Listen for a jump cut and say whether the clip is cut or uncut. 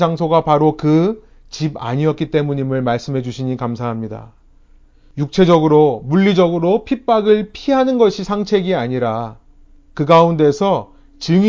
uncut